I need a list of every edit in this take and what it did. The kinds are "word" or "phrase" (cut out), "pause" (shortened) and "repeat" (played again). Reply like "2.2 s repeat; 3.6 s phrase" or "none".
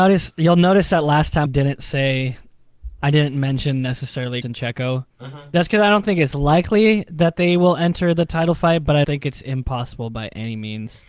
1.5 s word; 4.4 s word; 5.1 s pause; 9.0 s word